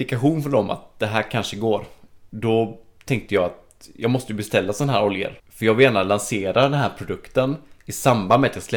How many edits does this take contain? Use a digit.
1